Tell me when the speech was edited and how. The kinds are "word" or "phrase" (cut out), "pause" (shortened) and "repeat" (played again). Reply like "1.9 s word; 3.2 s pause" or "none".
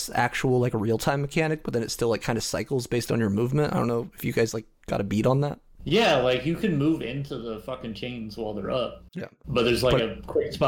9.1 s pause